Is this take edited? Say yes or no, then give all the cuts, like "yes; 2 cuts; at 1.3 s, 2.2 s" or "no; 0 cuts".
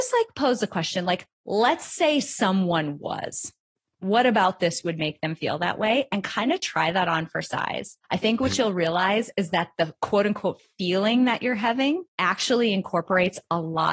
yes; 3 cuts; at 3.8 s, 8.0 s, 12.1 s